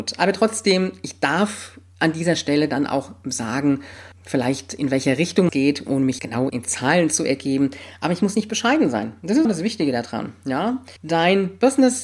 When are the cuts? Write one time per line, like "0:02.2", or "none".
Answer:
0:04.1
0:05.5
0:06.2
0:06.5
0:09.4
0:11.0